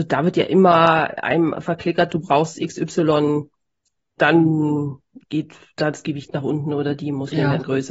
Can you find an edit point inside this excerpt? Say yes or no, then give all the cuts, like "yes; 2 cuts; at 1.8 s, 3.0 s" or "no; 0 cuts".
yes; 1 cut; at 4.2 s